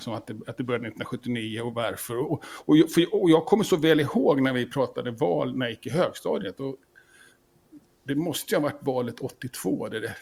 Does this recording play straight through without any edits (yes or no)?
yes